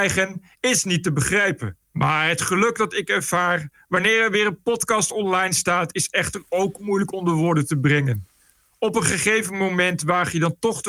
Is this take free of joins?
no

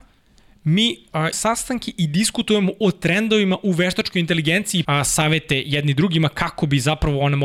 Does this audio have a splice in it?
yes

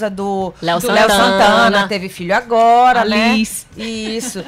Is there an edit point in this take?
no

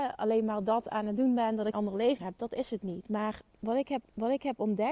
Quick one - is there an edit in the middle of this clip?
yes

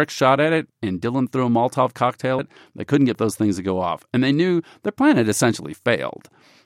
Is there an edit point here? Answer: yes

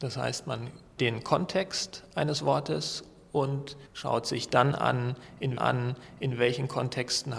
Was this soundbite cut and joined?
yes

